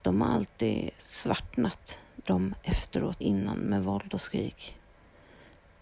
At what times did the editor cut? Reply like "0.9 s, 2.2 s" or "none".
2.3 s, 3.2 s